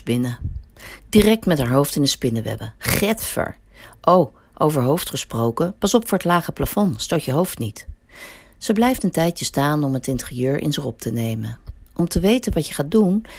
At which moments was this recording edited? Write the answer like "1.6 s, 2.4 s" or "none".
none